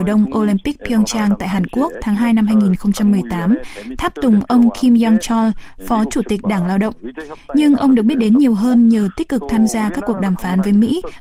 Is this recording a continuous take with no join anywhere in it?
yes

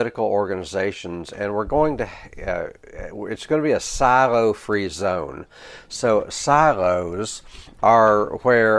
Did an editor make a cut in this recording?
no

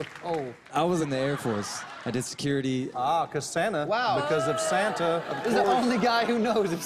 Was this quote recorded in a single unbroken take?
yes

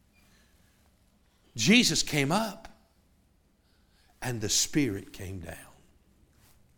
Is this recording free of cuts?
yes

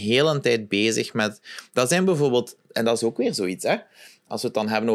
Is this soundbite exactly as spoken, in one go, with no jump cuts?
yes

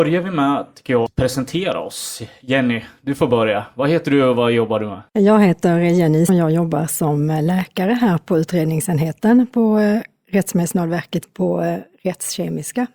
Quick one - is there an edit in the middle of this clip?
yes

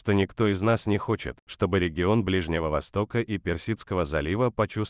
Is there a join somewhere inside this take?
no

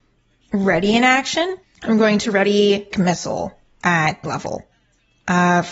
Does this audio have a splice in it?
yes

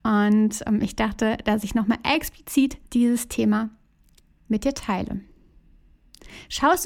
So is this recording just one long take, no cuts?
no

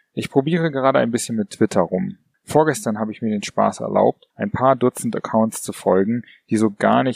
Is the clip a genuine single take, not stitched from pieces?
no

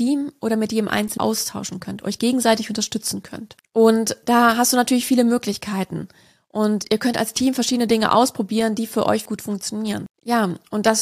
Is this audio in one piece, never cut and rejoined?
no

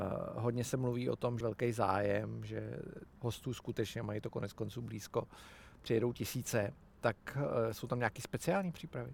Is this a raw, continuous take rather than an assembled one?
no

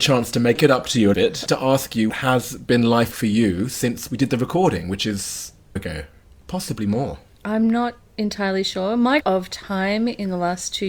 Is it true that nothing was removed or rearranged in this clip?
no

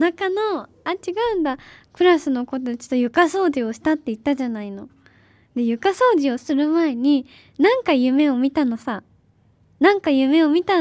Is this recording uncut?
yes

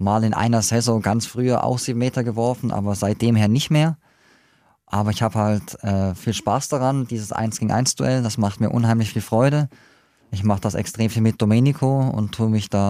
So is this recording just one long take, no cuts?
yes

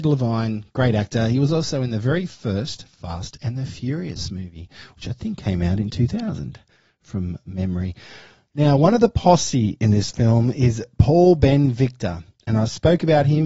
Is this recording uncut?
yes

